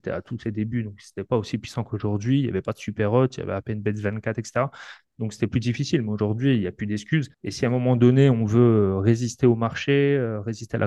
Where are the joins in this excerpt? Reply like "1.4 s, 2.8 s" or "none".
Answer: 7.3 s

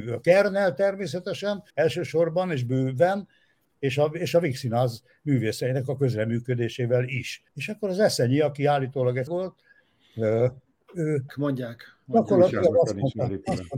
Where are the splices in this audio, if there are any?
1.7 s, 7.5 s, 9.3 s, 11.3 s

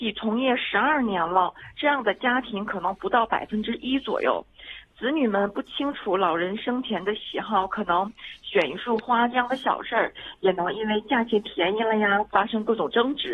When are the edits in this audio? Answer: 12.3 s

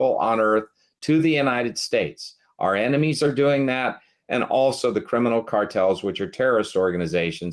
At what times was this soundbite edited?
none

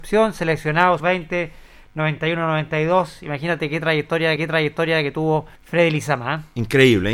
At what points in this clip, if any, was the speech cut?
1.0 s, 4.4 s, 5.6 s

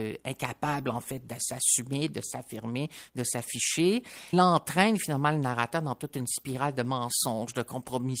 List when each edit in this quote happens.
4.3 s

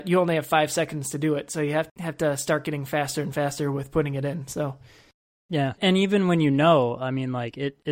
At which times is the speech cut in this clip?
1.9 s, 5.8 s

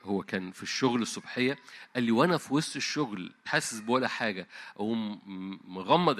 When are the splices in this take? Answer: 3.5 s

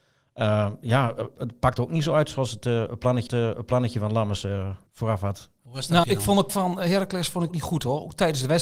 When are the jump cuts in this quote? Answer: 3.3 s, 4.9 s, 6.0 s, 6.5 s, 7.5 s

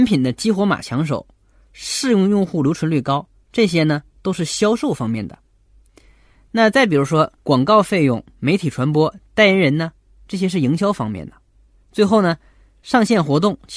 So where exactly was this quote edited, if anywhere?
7.4 s

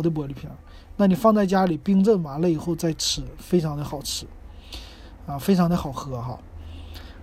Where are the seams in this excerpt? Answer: none

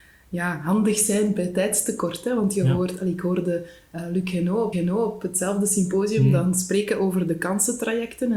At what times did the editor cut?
4.7 s

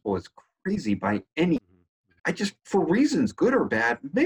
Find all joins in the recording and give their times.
1.6 s, 2.2 s

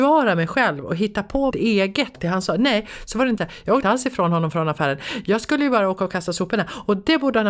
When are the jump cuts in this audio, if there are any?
1.5 s, 2.1 s, 3.4 s, 3.8 s

